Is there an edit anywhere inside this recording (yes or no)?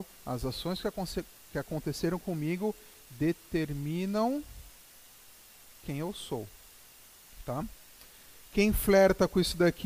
no